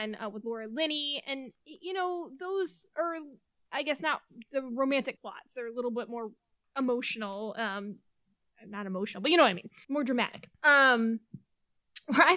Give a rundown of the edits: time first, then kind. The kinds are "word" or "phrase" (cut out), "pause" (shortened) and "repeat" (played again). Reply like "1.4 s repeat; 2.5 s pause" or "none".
5.2 s word; 6.5 s pause; 9.8 s pause; 10.5 s pause